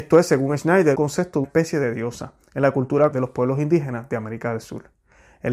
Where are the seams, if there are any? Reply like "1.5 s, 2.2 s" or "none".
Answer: 0.9 s, 1.4 s, 3.1 s